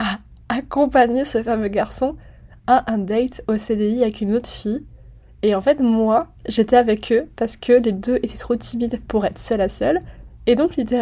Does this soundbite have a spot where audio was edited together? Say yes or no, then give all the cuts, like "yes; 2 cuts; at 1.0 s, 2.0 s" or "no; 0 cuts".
yes; 1 cut; at 6.4 s